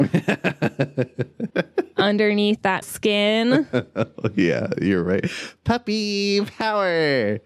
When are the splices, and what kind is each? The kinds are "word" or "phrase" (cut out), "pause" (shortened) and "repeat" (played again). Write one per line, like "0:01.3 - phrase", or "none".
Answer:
0:01.5 - pause
0:02.8 - word

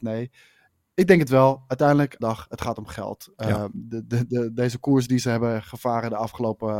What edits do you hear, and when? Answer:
0:02.2 - phrase

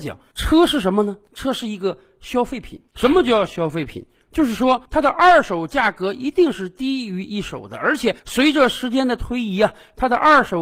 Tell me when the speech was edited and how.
0:04.8 - pause
0:08.2 - pause

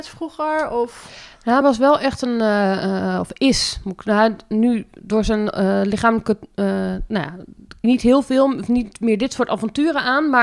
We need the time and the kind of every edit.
0:01.6 - phrase
0:07.8 - phrase

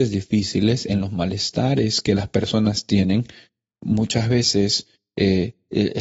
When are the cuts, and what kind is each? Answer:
none

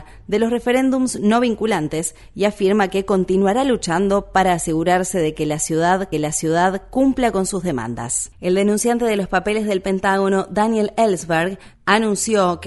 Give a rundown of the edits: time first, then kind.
0:06.1 - repeat

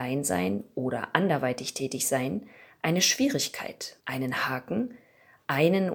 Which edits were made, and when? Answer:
0:04.0 - pause

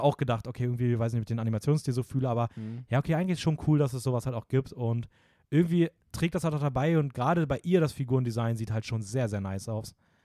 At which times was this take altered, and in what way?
0:06.0 - pause

